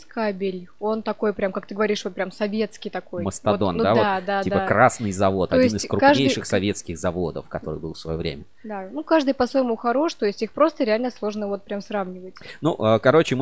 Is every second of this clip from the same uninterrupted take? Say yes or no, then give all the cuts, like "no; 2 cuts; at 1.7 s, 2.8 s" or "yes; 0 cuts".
yes; 0 cuts